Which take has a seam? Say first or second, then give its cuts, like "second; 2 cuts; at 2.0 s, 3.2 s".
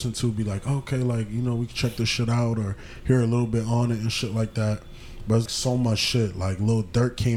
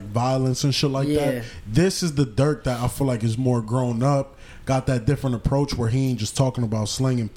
first; 1 cut; at 5.5 s